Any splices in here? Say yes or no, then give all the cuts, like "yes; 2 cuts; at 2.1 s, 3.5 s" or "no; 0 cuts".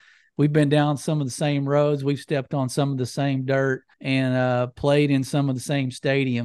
yes; 1 cut; at 3.9 s